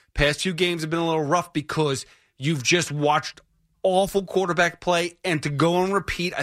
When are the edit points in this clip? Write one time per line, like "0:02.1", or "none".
none